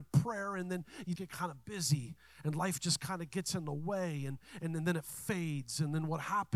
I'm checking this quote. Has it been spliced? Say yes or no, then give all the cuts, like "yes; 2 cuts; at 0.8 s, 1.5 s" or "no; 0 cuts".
yes; 1 cut; at 1.2 s